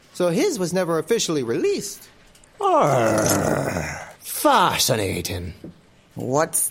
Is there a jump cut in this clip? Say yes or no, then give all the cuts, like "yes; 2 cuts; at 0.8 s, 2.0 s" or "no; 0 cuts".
yes; 1 cut; at 4.2 s